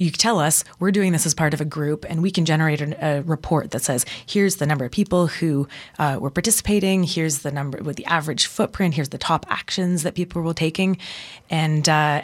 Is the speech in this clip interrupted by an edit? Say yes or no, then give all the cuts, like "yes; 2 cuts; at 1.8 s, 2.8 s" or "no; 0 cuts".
no; 0 cuts